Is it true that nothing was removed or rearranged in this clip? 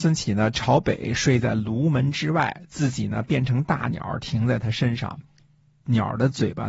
yes; 0 cuts

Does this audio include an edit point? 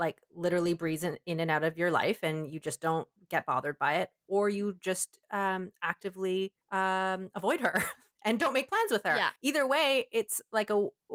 yes; 2 cuts; at 6.6 s, 9.4 s

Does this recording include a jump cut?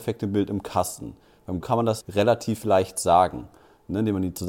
yes; 2 cuts; at 1.6 s, 2.0 s

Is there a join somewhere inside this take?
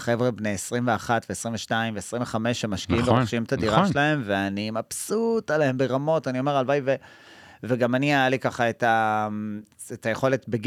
no; 0 cuts

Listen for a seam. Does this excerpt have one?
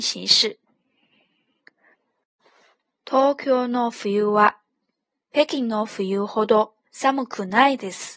no; 0 cuts

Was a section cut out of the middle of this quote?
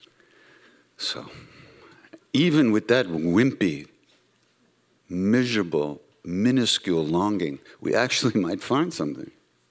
no; 0 cuts

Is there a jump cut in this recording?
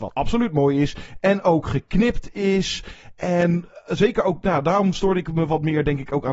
no; 0 cuts

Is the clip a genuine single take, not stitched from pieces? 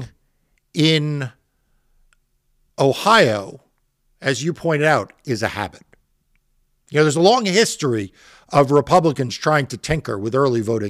yes; 0 cuts

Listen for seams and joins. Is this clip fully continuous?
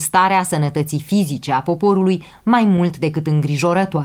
yes; 0 cuts

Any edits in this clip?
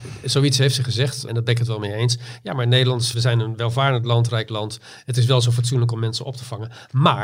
yes; 2 cuts; at 1.3 s, 3.1 s

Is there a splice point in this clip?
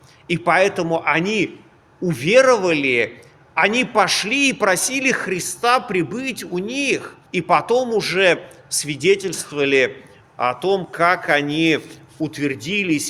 yes; 1 cut; at 7.3 s

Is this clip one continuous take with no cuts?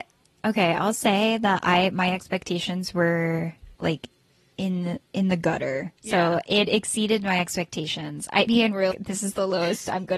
no; 4 cuts; at 3.8 s, 6.0 s, 8.5 s, 8.9 s

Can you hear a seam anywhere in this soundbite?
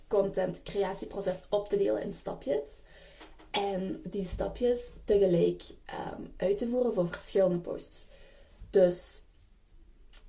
no; 0 cuts

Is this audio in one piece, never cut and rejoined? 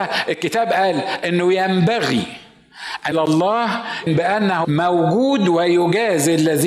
no; 3 cuts; at 3.1 s, 4.1 s, 4.6 s

